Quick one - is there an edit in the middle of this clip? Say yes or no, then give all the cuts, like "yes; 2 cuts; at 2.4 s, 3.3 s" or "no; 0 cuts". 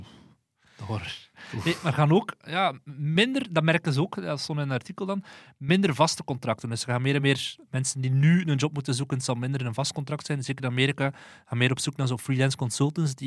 no; 0 cuts